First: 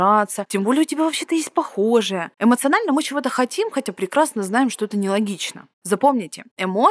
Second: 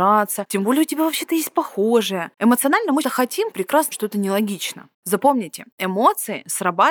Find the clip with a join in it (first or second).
second